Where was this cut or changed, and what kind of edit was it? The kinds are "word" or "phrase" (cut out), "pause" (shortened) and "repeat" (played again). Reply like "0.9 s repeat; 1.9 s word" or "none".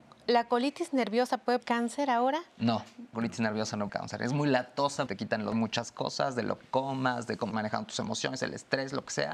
1.6 s word; 3.1 s word; 3.9 s word; 5.1 s phrase; 5.5 s phrase; 6.6 s word; 7.5 s word